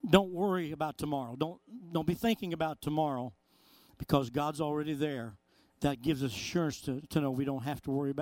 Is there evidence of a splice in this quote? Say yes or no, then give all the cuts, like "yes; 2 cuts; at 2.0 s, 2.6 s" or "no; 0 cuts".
no; 0 cuts